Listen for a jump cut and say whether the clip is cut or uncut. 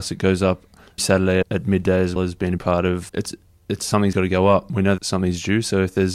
cut